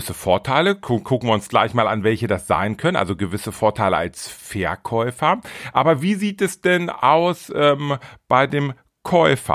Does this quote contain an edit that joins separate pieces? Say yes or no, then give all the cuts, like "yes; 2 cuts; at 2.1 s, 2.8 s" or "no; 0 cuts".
no; 0 cuts